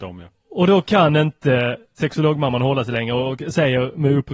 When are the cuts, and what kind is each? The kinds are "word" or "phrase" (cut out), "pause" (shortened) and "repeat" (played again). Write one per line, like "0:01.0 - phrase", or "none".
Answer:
0:02.0 - word